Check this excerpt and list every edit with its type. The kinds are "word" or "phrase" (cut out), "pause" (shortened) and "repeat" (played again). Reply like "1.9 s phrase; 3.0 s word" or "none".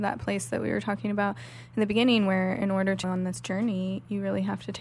3.0 s word